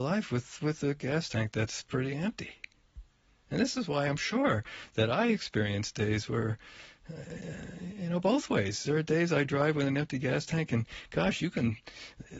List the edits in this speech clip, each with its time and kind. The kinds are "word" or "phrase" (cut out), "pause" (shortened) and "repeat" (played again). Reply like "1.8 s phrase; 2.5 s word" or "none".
none